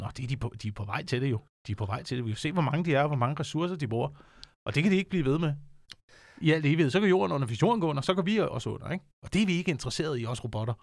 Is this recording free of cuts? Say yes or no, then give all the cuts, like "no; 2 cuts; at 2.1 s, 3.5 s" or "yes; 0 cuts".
yes; 0 cuts